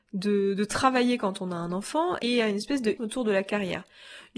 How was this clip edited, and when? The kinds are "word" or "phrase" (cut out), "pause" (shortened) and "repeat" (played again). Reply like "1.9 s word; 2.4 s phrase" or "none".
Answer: 2.2 s word; 3.0 s word

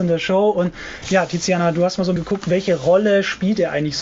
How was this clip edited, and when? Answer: 2.2 s word

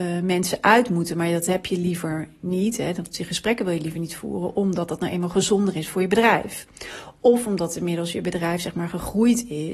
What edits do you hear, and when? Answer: none

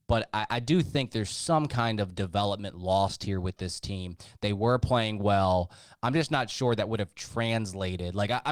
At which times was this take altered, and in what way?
none

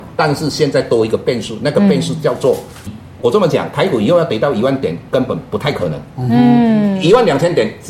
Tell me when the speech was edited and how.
2.9 s word

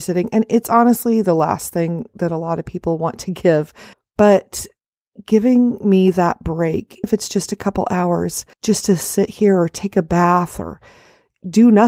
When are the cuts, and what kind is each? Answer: 3.9 s pause; 7.0 s phrase; 8.5 s pause

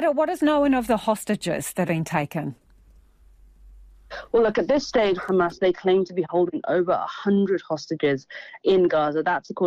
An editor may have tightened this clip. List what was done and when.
1.9 s word; 5.2 s phrase; 8.6 s word

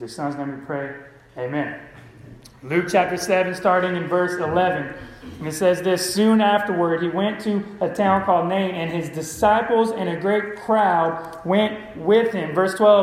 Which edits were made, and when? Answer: none

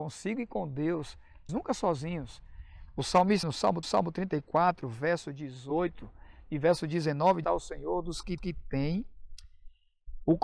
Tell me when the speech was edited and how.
1.5 s word; 3.4 s word; 3.8 s repeat; 7.4 s phrase; 8.4 s repeat

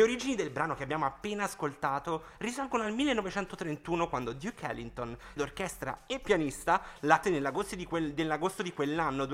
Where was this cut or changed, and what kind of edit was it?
5.4 s word; 7.2 s word

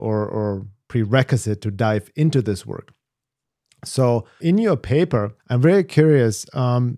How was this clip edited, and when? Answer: 4.4 s word; 5.4 s pause

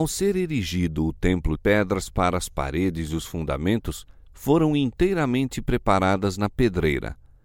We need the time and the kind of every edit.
1.6 s phrase

